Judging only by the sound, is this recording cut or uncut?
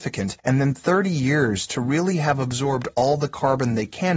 uncut